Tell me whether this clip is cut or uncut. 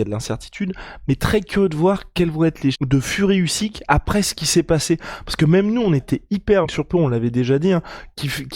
cut